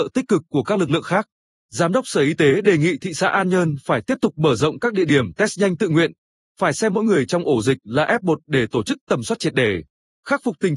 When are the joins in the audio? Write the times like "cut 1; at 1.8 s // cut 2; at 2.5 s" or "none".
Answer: none